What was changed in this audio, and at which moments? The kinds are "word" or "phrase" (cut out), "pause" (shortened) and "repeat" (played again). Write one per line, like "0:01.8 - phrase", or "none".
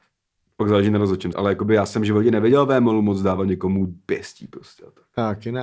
0:01.3 - word